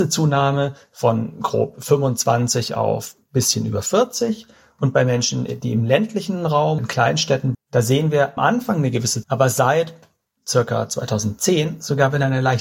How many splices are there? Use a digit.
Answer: 4